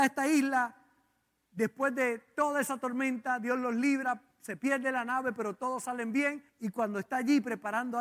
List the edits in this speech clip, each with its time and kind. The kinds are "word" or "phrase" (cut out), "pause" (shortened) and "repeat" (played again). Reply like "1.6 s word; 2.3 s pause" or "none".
4.3 s pause; 6.5 s pause